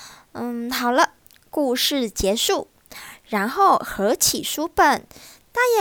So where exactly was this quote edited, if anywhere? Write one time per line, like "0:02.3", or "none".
none